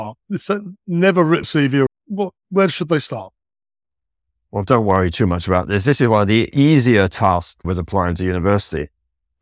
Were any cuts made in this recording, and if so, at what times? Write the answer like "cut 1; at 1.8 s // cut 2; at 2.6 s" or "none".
cut 1; at 1.4 s // cut 2; at 1.9 s // cut 3; at 7.6 s

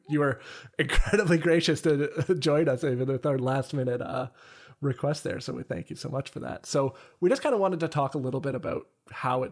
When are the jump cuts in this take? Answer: none

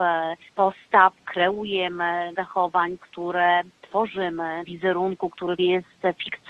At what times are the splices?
cut 1; at 1.2 s // cut 2; at 2.3 s // cut 3; at 4.6 s // cut 4; at 5.6 s

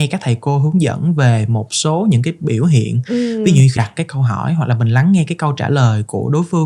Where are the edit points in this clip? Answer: cut 1; at 3.8 s

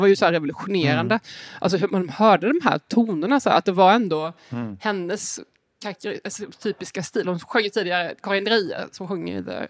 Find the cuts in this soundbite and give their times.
cut 1; at 1.9 s

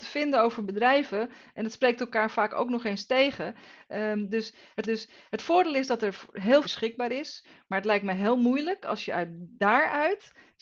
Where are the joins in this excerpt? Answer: cut 1; at 4.8 s // cut 2; at 6.6 s

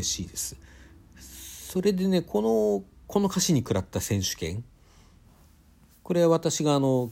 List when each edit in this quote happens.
cut 1; at 3.0 s

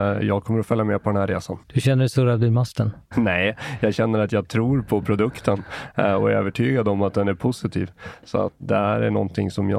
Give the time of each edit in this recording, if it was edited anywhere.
cut 1; at 1.6 s // cut 2; at 3.1 s

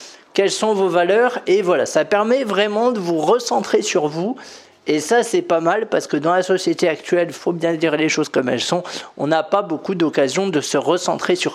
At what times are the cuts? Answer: none

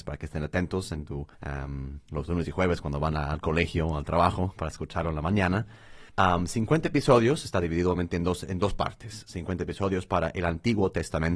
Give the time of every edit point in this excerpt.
cut 1; at 1.3 s // cut 2; at 6.1 s

